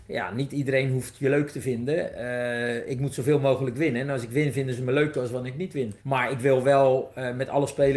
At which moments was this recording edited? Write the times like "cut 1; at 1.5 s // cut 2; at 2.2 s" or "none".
cut 1; at 6.0 s